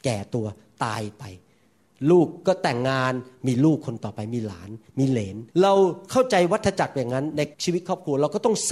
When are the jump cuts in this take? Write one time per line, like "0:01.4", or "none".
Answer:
0:05.5
0:07.5